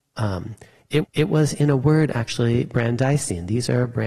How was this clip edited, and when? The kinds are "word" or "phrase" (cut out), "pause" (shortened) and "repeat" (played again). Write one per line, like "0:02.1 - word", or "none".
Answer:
0:01.0 - repeat